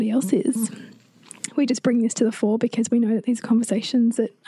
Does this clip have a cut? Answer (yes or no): no